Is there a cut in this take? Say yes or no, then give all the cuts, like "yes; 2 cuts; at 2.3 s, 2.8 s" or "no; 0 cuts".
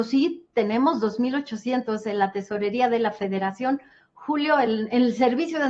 no; 0 cuts